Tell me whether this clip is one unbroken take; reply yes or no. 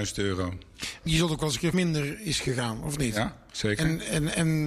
no